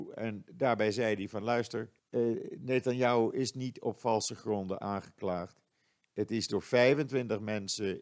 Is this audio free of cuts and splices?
no; 1 cut; at 2.0 s

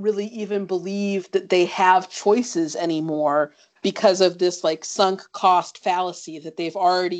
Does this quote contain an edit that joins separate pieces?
no; 0 cuts

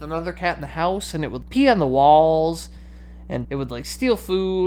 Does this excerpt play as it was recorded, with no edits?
no; 2 cuts; at 1.4 s, 3.4 s

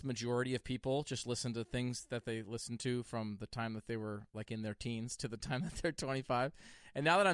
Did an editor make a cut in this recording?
no; 0 cuts

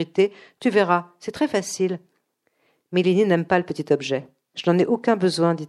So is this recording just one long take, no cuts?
yes; 0 cuts

